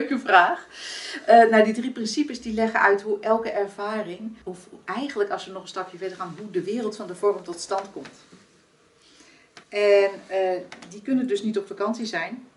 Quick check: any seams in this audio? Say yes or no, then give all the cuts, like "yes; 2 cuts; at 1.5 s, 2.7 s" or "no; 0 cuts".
yes; 2 cuts; at 4.4 s, 9.6 s